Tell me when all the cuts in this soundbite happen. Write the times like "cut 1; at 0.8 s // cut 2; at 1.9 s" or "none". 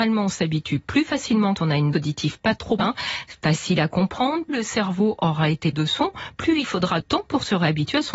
cut 1; at 1.6 s // cut 2; at 1.9 s // cut 3; at 2.8 s // cut 4; at 4.5 s // cut 5; at 5.7 s // cut 6; at 6.6 s // cut 7; at 7.0 s